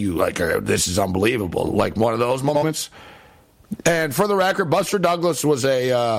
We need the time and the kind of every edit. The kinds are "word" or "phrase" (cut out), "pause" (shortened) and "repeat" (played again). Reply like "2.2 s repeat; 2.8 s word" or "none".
none